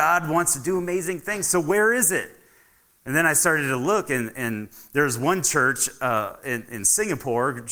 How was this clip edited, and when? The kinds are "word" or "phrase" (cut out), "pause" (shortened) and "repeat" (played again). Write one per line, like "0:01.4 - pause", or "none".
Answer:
none